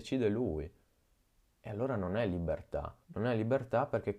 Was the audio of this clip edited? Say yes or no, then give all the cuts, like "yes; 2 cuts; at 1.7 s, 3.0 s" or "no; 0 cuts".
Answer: yes; 1 cut; at 3.0 s